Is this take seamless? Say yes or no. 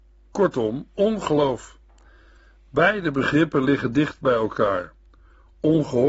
yes